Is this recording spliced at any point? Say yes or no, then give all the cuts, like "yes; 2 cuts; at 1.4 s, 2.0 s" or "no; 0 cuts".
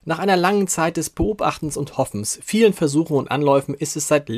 no; 0 cuts